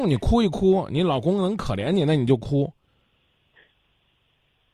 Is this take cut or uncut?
uncut